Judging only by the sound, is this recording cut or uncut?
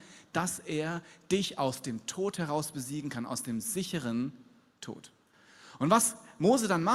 uncut